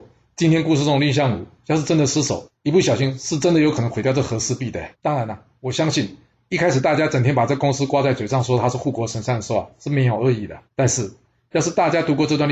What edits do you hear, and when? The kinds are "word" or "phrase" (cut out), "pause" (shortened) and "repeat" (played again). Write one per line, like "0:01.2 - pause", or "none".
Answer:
0:04.9 - pause
0:10.7 - pause